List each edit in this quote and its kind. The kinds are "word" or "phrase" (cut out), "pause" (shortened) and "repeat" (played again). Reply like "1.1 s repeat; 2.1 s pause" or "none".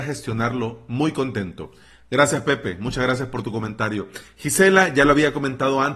none